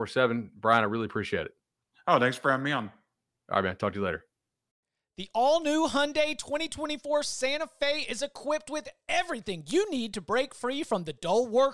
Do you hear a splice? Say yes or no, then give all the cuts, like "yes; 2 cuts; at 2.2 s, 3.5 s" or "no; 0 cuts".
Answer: no; 0 cuts